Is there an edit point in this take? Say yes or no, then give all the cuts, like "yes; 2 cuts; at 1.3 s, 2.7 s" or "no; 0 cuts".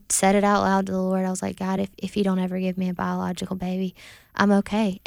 no; 0 cuts